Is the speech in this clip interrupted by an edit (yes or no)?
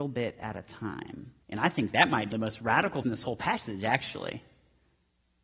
yes